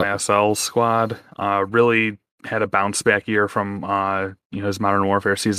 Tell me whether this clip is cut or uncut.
uncut